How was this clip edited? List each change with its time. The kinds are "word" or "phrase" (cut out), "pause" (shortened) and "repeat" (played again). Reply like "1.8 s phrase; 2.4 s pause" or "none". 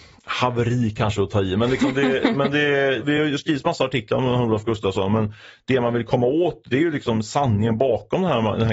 none